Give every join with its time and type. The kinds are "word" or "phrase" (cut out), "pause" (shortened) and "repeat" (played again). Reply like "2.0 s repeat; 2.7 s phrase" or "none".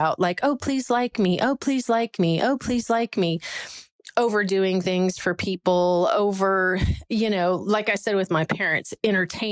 none